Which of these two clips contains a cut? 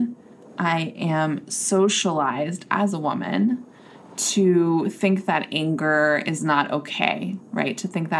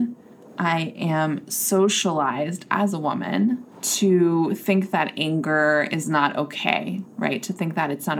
second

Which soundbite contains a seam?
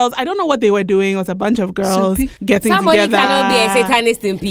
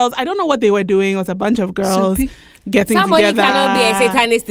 first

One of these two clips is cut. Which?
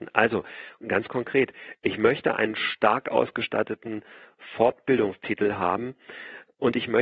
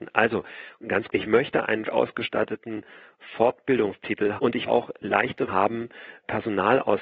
second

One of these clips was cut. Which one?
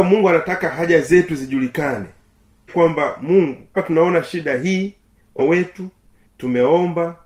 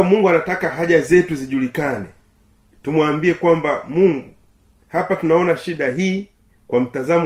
first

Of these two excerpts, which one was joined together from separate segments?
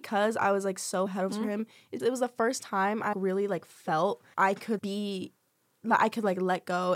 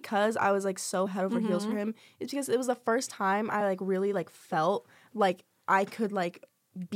first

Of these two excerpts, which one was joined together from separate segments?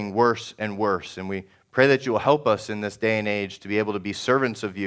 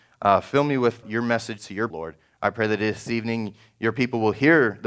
second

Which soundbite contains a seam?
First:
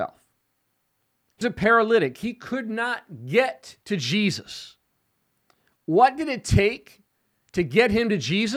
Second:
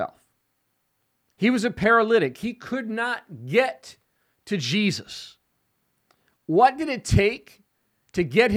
first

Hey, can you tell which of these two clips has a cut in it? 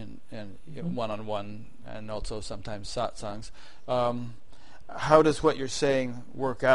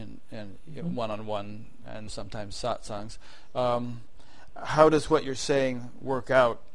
second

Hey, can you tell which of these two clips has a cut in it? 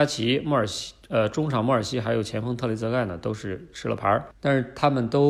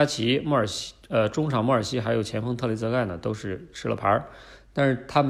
first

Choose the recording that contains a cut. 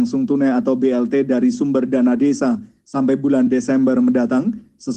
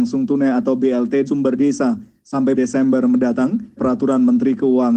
second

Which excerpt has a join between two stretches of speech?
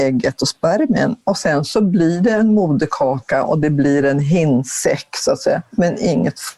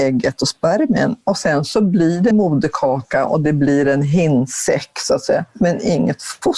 second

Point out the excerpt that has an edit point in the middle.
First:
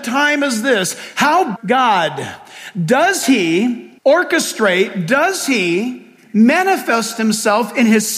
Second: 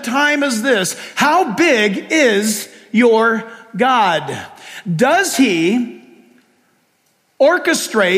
first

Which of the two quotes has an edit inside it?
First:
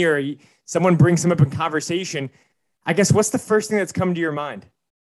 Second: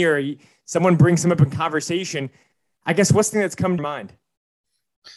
second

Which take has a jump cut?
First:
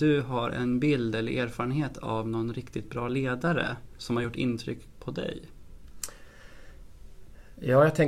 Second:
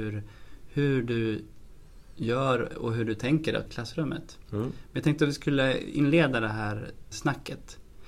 second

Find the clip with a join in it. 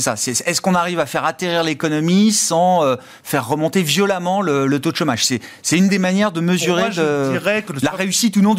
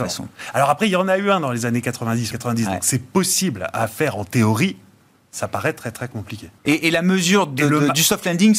second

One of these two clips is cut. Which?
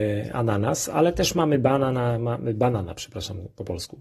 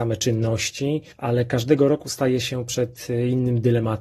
second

